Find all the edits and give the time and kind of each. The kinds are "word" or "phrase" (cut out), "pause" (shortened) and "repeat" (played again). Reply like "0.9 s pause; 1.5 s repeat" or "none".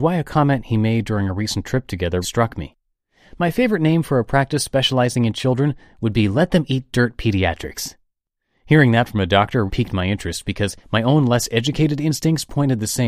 2.2 s word; 9.7 s word; 10.8 s pause